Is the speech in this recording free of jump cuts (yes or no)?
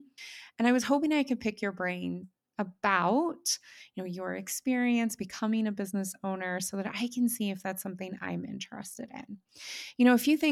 yes